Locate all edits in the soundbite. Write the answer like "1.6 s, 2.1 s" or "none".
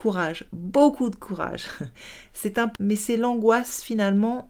2.8 s